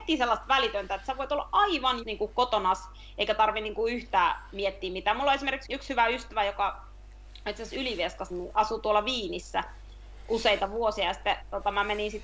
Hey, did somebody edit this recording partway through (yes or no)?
yes